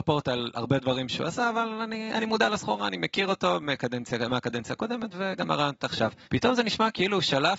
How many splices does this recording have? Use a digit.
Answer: 1